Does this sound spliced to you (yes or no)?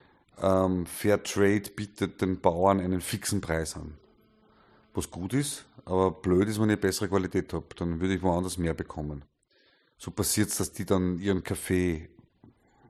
no